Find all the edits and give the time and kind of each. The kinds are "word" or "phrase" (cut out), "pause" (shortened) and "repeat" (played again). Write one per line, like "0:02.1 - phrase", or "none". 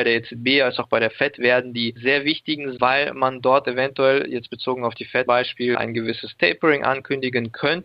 0:02.0 - word
0:02.8 - word
0:05.3 - word
0:05.7 - word